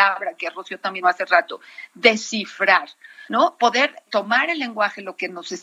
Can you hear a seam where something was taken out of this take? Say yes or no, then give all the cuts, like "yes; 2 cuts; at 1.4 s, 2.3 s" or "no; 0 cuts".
yes; 2 cuts; at 1.0 s, 4.1 s